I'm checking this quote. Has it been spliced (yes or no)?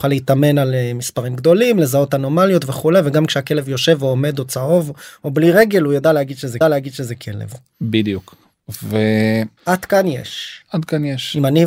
yes